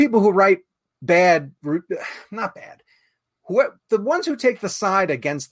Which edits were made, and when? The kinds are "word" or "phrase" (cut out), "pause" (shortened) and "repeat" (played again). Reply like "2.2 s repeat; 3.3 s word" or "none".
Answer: none